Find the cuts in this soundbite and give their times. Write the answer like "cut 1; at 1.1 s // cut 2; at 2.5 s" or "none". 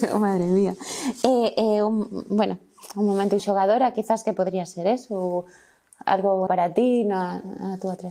cut 1; at 3.4 s // cut 2; at 6.5 s